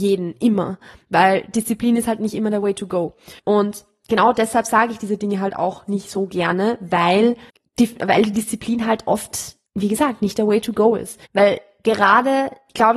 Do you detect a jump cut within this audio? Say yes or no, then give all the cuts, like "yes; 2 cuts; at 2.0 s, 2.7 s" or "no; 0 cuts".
yes; 4 cuts; at 3.4 s, 7.5 s, 9.7 s, 11.2 s